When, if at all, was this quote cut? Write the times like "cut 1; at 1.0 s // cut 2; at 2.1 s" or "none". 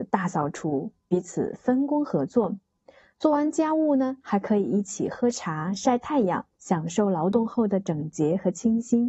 cut 1; at 6.5 s